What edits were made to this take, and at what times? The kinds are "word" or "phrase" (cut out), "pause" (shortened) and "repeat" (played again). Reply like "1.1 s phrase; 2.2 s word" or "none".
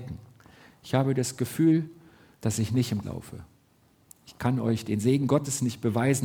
3.0 s word